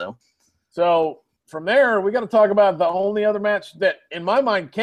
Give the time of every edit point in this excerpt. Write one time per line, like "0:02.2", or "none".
none